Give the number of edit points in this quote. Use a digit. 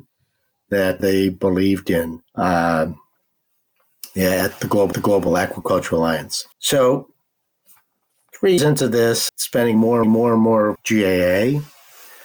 8